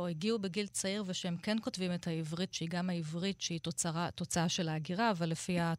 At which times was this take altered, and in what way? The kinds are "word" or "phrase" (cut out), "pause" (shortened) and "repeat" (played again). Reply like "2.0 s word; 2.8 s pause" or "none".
2.5 s word